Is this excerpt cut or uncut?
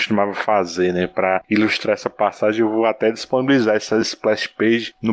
uncut